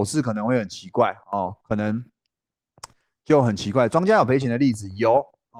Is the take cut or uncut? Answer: uncut